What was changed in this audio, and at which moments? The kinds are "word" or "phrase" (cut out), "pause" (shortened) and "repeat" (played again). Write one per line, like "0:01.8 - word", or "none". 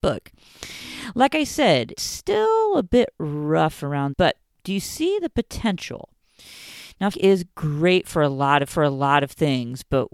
0:02.0 - word
0:04.1 - phrase
0:04.5 - pause
0:07.1 - word
0:08.6 - repeat